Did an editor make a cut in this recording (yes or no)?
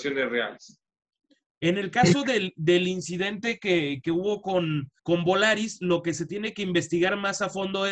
yes